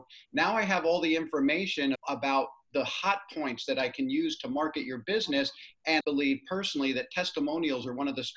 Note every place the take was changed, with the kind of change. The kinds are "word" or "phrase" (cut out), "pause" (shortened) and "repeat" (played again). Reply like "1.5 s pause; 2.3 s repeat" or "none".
1.9 s word; 6.0 s word